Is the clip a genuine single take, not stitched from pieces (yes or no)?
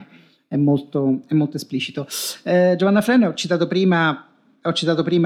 yes